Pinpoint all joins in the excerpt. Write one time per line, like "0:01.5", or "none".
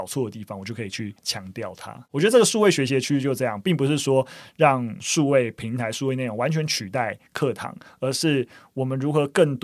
0:01.2